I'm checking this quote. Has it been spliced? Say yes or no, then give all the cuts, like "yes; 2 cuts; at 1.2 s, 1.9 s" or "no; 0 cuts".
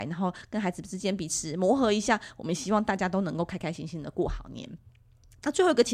no; 0 cuts